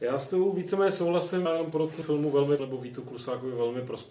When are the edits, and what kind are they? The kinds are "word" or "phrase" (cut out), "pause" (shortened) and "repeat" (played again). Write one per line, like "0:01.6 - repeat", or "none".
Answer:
0:01.4 - word
0:02.0 - word
0:02.6 - word